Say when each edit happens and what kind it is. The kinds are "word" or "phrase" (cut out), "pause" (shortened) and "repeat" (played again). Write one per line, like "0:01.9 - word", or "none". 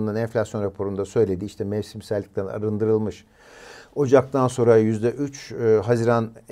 none